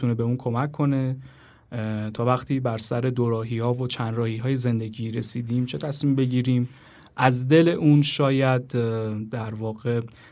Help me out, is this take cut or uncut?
uncut